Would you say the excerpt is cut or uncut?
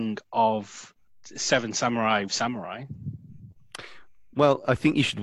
cut